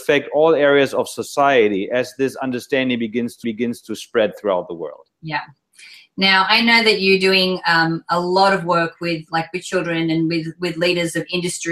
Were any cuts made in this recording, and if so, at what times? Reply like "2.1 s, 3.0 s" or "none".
3.4 s, 5.1 s